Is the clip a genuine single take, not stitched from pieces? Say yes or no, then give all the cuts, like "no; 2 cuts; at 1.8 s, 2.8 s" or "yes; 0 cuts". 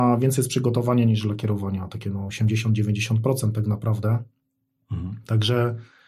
yes; 0 cuts